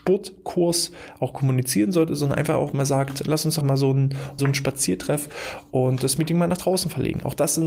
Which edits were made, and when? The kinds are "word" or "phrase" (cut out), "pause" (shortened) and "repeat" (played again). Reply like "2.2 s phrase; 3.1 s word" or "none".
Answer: 3.2 s word; 3.6 s word; 4.4 s phrase